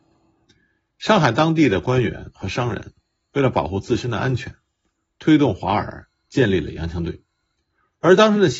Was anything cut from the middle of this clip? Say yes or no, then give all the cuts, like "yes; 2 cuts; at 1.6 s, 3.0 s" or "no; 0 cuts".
no; 0 cuts